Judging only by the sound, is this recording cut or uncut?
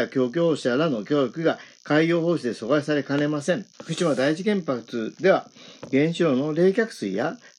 cut